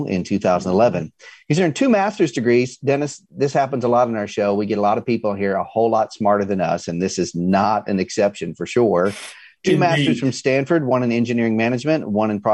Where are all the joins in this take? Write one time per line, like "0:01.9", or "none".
none